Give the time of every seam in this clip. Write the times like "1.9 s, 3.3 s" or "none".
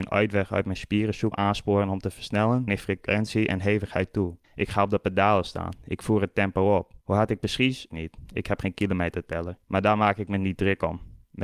1.3 s, 2.7 s, 4.4 s, 7.0 s, 7.9 s, 9.6 s